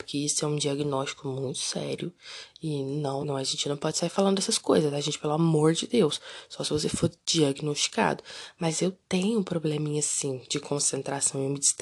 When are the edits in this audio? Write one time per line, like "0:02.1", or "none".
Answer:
0:03.2

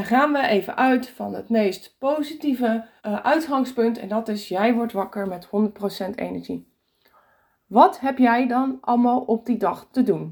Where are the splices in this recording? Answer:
0:03.0

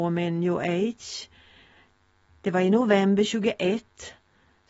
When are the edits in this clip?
none

